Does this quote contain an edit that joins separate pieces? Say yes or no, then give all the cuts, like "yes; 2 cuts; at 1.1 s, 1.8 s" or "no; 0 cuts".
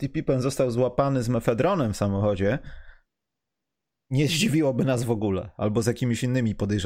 no; 0 cuts